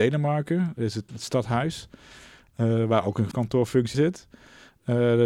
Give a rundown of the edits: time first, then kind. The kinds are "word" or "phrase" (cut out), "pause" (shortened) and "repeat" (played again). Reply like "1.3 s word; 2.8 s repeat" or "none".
1.1 s word; 3.3 s word; 3.9 s word